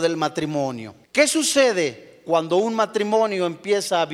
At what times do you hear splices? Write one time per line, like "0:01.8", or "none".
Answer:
0:01.0